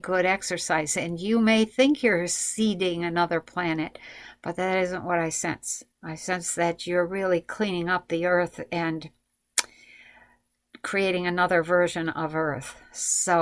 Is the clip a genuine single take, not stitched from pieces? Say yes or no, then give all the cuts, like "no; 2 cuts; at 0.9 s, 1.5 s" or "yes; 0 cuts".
no; 1 cut; at 5.9 s